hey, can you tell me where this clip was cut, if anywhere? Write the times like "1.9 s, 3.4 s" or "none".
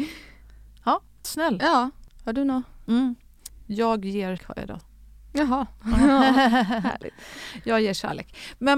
1.2 s, 4.4 s, 4.8 s